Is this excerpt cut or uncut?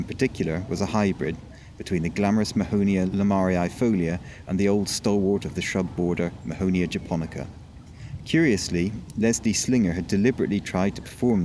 uncut